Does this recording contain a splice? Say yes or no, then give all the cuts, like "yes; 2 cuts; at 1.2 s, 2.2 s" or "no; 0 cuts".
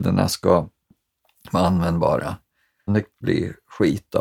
yes; 2 cuts; at 2.9 s, 3.2 s